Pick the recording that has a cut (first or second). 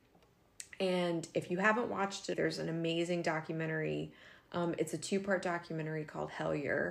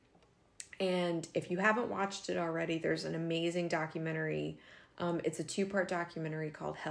first